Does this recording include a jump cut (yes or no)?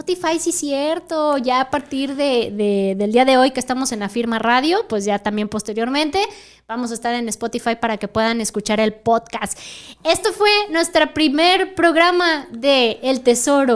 no